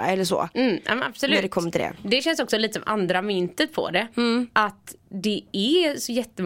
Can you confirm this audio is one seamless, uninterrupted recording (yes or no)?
yes